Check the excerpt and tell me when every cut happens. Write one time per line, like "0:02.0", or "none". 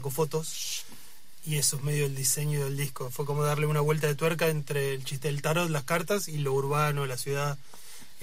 none